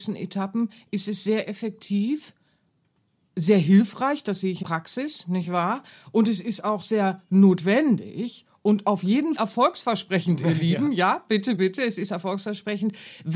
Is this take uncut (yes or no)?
no